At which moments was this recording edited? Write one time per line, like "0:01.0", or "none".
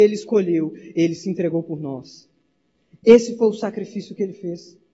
none